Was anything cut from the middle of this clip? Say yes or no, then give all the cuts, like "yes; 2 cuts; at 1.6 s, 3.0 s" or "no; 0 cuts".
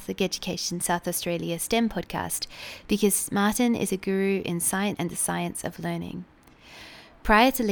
yes; 1 cut; at 5.0 s